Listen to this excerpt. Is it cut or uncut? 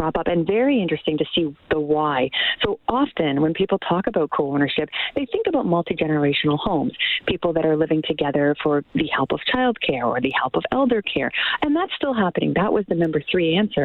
uncut